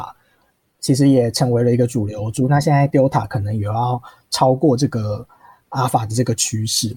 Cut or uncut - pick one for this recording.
uncut